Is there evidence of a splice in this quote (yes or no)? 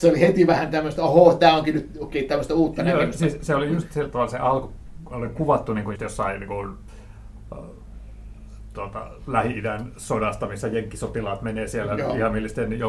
yes